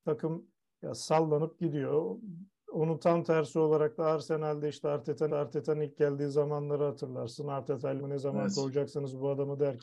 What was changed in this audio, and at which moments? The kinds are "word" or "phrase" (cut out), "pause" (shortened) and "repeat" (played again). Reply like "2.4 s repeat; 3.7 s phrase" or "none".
5.3 s repeat; 8.0 s phrase